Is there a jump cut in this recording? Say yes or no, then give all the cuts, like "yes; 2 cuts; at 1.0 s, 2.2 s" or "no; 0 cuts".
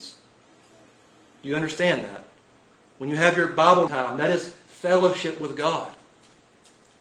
yes; 1 cut; at 3.9 s